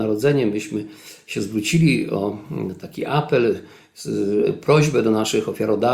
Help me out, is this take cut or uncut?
uncut